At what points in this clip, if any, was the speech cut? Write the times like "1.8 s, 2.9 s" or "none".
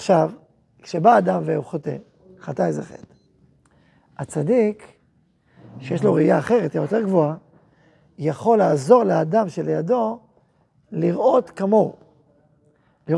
none